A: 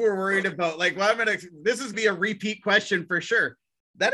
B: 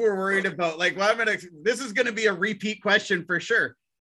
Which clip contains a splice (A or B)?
A